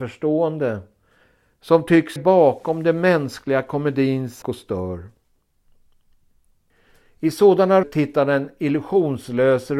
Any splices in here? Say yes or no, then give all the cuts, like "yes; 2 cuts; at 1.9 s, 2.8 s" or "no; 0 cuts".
yes; 3 cuts; at 2.2 s, 4.4 s, 7.8 s